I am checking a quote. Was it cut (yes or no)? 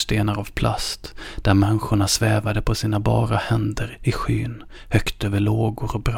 no